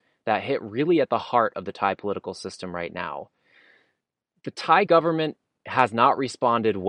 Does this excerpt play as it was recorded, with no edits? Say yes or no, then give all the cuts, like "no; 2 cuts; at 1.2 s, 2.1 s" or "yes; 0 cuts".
yes; 0 cuts